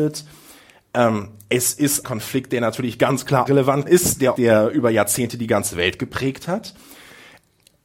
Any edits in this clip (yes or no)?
yes